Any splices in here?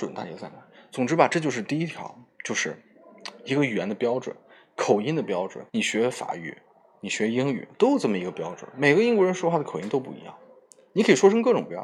yes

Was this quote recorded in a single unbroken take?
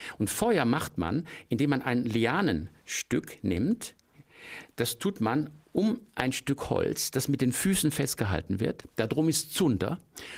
yes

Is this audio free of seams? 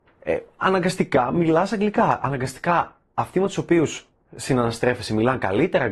yes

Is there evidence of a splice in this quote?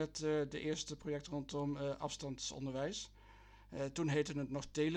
no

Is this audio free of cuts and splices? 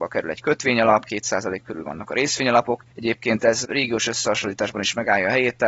yes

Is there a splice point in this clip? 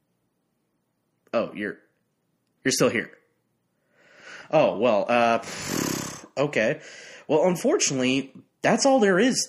no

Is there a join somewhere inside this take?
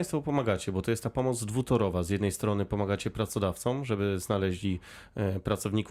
no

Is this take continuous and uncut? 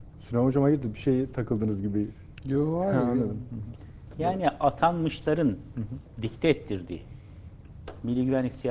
yes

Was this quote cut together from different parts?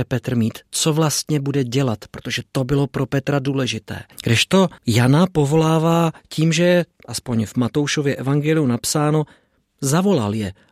yes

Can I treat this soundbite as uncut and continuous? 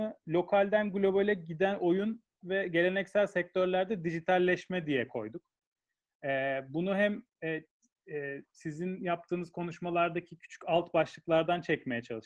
yes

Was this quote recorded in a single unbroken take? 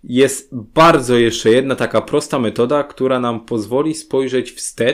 yes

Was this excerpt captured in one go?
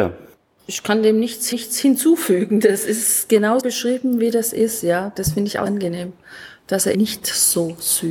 no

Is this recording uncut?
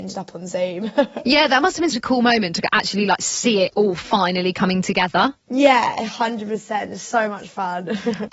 no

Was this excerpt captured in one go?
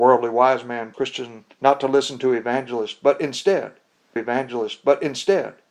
no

